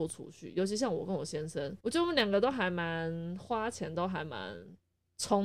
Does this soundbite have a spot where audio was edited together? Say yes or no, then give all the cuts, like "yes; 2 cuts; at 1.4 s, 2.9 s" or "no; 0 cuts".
yes; 1 cut; at 1.8 s